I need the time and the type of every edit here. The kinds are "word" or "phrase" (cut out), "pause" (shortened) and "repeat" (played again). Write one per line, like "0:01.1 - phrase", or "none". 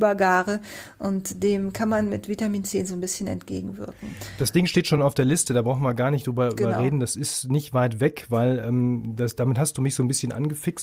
none